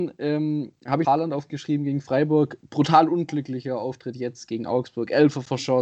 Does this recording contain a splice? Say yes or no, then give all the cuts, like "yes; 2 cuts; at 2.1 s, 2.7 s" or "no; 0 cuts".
yes; 1 cut; at 1.0 s